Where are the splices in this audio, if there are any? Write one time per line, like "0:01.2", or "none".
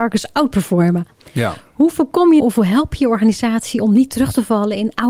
0:02.4